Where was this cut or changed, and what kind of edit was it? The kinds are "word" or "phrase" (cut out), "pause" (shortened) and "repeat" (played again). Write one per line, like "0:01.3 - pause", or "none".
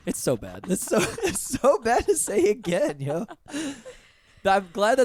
none